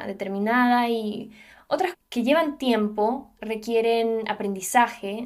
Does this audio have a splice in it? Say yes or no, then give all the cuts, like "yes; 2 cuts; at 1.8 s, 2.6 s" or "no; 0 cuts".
yes; 1 cut; at 1.9 s